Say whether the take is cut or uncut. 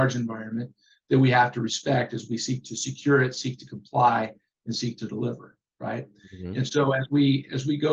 uncut